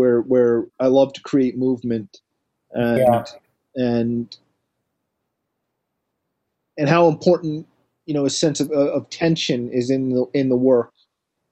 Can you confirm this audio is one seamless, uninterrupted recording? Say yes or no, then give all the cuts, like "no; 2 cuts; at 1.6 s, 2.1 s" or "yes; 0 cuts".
yes; 0 cuts